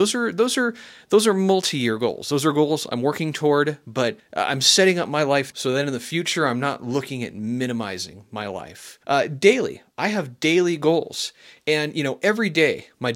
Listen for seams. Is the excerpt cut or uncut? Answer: cut